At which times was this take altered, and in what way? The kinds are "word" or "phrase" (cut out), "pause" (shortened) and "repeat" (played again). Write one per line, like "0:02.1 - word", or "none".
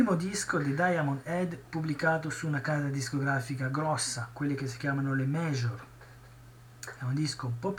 none